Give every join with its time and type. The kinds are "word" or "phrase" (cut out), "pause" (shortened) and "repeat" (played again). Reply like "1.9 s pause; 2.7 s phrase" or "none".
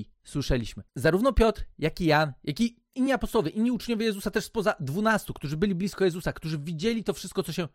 none